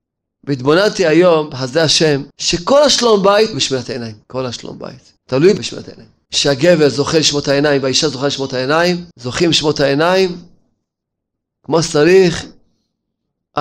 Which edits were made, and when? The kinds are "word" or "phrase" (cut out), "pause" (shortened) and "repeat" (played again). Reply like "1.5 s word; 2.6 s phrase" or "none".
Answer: 2.3 s pause; 3.5 s word; 4.2 s pause; 5.2 s pause; 6.3 s pause; 9.1 s pause